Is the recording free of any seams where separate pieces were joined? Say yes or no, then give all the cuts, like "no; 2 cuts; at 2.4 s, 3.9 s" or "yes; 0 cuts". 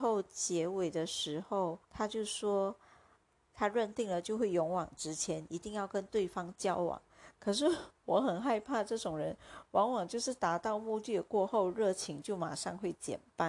no; 1 cut; at 1.8 s